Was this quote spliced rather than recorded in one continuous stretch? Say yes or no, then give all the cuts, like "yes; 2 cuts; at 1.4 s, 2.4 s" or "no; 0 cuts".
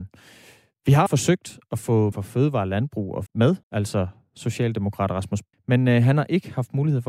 yes; 5 cuts; at 1.1 s, 2.1 s, 3.3 s, 3.6 s, 5.5 s